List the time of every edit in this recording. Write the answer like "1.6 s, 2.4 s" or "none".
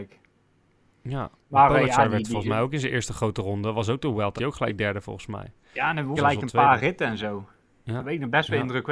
4.4 s, 6.2 s